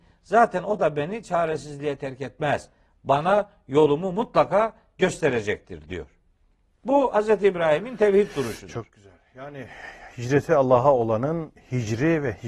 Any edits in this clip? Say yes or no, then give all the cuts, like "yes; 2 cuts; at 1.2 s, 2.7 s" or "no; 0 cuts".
no; 0 cuts